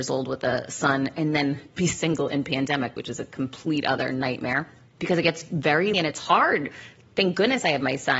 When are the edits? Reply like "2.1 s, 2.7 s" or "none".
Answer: 3.0 s, 5.9 s